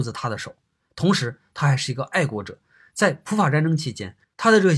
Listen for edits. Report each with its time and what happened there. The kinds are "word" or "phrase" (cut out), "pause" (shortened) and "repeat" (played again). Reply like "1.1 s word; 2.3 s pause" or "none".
none